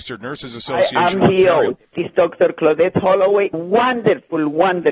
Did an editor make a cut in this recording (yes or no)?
yes